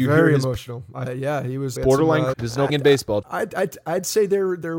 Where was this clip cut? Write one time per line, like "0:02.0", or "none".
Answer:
0:01.1
0:01.8
0:02.3
0:02.7
0:03.2